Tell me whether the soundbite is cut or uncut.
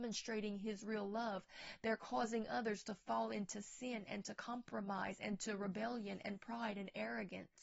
uncut